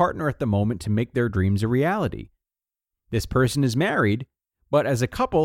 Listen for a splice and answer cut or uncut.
uncut